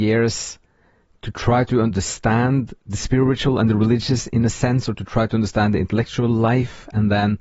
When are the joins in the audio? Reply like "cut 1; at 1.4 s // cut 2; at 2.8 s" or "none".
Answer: none